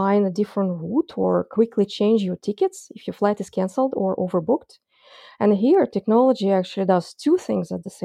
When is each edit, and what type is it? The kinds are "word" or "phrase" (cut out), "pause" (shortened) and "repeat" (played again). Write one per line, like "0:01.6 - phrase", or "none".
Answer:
none